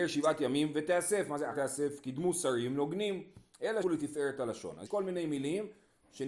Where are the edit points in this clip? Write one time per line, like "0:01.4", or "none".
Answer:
0:01.5
0:03.8
0:04.9

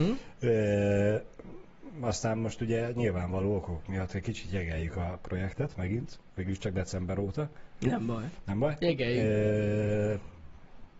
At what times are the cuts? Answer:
none

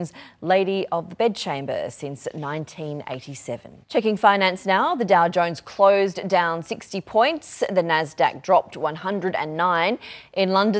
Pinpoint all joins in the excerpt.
0:03.8

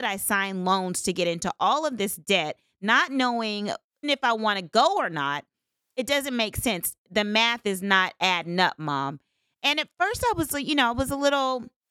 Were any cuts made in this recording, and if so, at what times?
0:04.0

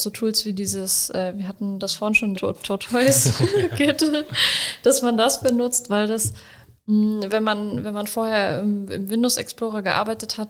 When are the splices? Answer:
0:02.3

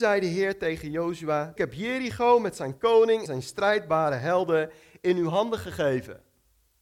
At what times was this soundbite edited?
0:01.6
0:03.3

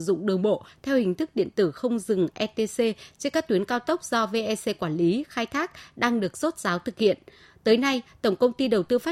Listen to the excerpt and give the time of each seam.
none

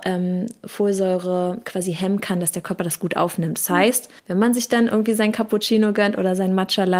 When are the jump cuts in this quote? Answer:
0:04.2

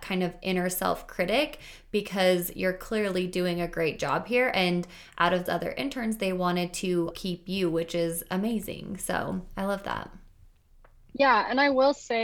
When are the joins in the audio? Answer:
0:05.5
0:07.1

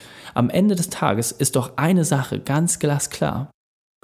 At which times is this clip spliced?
none

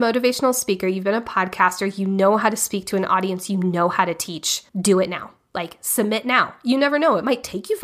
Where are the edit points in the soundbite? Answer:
0:04.7

